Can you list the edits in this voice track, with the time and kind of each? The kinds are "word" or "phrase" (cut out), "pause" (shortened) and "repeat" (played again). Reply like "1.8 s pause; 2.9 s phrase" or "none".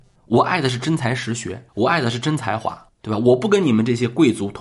1.7 s pause